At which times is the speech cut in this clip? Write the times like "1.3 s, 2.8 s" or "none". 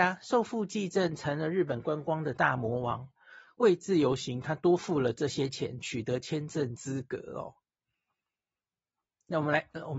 none

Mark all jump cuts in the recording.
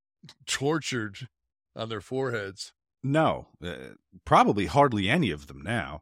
none

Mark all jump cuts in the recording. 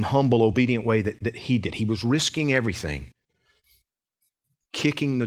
none

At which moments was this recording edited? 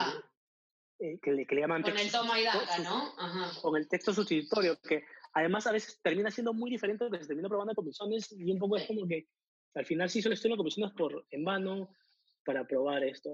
none

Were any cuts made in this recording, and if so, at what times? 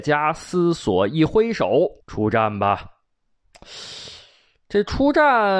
2.0 s

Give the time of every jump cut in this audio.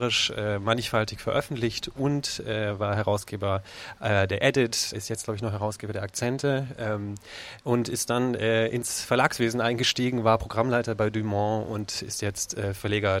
4.9 s

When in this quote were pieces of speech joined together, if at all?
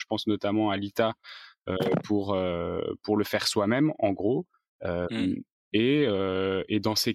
4.7 s

